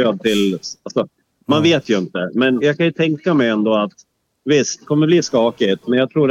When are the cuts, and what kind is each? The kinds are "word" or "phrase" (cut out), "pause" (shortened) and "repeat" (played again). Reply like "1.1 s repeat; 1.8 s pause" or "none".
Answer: 2.6 s word; 4.9 s word